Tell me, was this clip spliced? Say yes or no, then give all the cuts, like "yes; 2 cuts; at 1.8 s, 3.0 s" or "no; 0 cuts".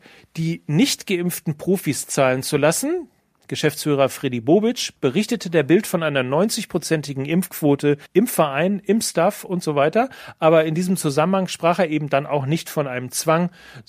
yes; 1 cut; at 8.1 s